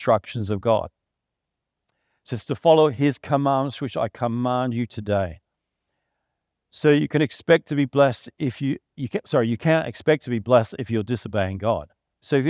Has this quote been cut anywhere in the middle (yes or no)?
no